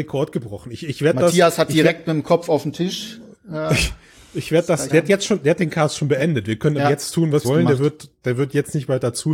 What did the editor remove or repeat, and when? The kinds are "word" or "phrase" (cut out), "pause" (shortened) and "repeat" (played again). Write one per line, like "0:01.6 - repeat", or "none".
0:04.9 - word
0:07.4 - word